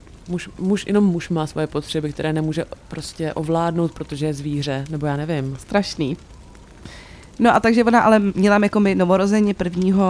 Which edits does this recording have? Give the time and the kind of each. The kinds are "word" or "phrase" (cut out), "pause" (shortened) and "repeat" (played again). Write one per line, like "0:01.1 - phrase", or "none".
none